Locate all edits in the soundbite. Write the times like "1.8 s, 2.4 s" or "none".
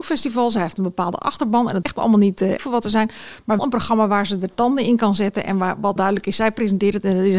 1.8 s, 2.6 s, 3.6 s, 6.0 s